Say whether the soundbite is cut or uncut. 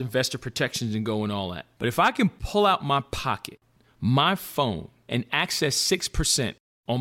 uncut